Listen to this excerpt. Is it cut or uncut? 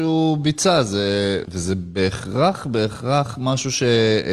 cut